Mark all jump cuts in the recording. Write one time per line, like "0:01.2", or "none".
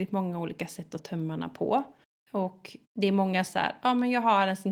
0:01.0
0:02.0
0:03.5